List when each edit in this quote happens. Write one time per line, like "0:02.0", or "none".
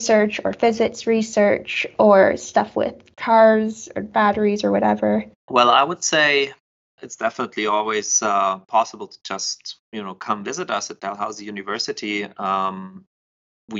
0:05.4
0:06.7